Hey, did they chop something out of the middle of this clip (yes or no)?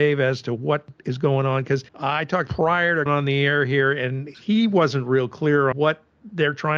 yes